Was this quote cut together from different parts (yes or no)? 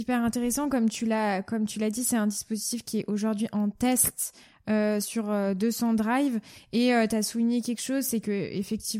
no